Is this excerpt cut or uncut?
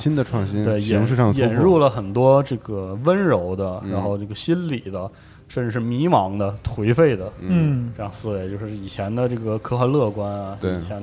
uncut